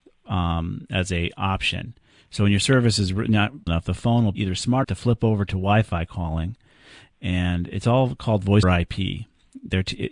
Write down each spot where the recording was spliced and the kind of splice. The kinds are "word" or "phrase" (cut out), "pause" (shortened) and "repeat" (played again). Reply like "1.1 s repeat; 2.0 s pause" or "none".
3.7 s word; 4.3 s word; 4.8 s word; 8.6 s word